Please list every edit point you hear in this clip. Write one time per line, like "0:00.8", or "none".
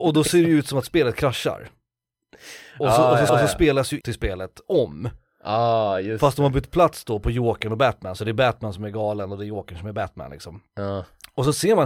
0:03.3
0:04.0